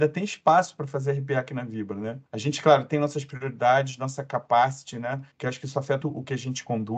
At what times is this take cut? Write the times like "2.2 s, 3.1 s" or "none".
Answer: 2.3 s, 5.3 s, 6.0 s